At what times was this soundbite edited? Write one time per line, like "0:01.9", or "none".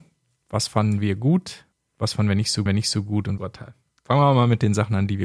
0:01.7
0:02.7
0:03.4